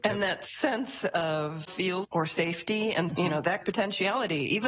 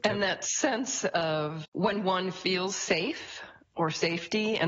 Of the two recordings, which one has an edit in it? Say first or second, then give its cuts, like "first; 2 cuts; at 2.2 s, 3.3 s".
first; 4 cuts; at 1.7 s, 2.0 s, 3.1 s, 3.6 s